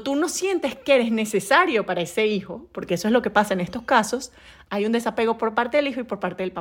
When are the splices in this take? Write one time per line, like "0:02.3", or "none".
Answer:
none